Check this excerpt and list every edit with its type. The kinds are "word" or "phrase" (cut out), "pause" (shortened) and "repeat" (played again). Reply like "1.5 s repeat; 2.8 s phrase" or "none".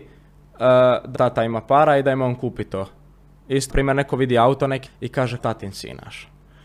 1.1 s word; 3.7 s word; 4.9 s word; 5.4 s word

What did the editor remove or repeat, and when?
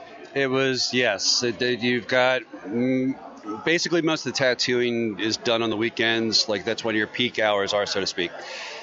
none

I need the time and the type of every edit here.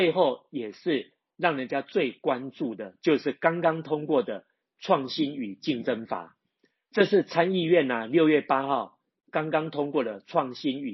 none

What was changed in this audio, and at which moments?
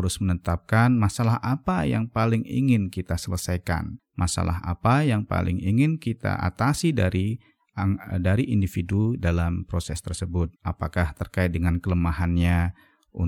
4.0 s pause; 10.6 s pause

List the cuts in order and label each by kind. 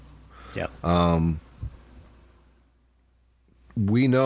none

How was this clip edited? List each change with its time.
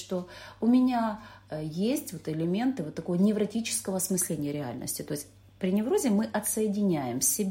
none

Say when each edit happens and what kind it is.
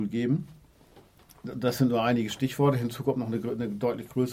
none

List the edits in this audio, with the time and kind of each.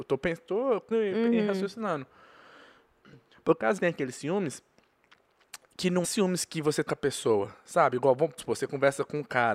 0.9 s word; 3.8 s word; 6.0 s word; 6.9 s word; 8.4 s word

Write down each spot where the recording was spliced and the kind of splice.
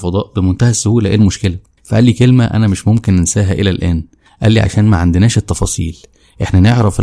none

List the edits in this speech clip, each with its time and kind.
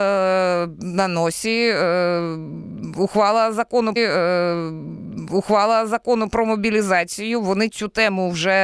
4.0 s repeat; 7.7 s word

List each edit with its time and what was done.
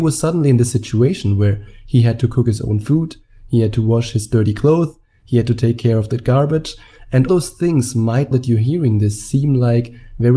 7.3 s word; 8.3 s word

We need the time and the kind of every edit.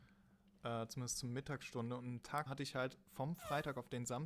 2.5 s word

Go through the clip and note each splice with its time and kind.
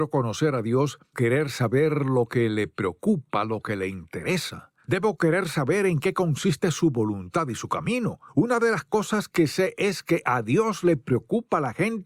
1.1 s word

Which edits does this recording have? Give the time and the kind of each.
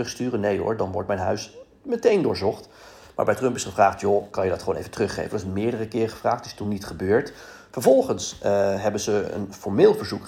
none

